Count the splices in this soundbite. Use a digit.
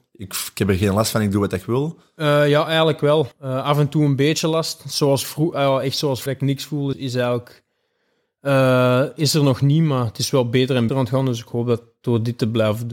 4